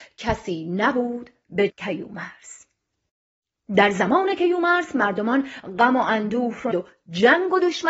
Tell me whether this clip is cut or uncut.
cut